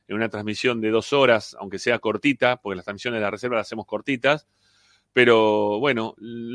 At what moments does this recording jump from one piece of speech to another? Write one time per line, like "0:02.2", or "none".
none

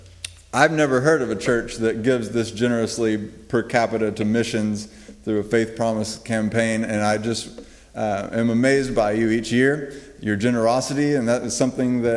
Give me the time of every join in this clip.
none

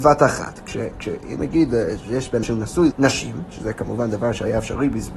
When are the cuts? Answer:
0:01.4
0:02.4
0:02.9

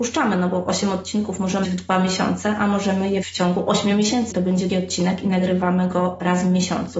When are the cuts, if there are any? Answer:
0:01.6
0:03.2
0:04.3
0:04.7

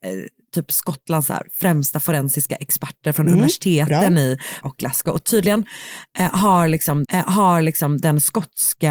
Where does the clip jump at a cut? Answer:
0:04.6
0:07.0

